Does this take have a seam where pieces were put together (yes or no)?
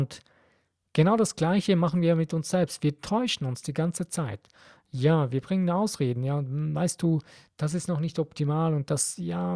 no